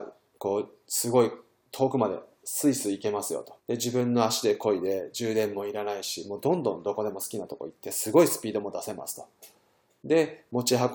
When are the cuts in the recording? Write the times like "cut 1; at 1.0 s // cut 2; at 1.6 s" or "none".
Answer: cut 1; at 3.6 s